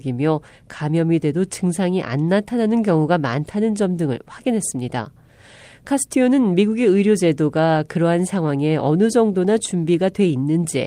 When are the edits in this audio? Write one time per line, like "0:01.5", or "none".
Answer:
none